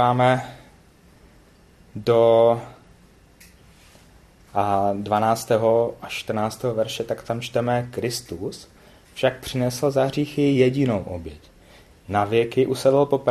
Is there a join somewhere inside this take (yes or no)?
no